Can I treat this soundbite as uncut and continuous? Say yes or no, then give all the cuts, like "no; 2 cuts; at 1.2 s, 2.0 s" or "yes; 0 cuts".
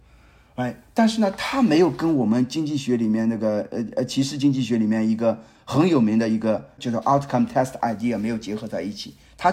yes; 0 cuts